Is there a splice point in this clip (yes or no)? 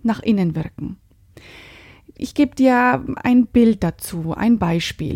no